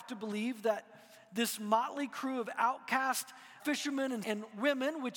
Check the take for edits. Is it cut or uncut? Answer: cut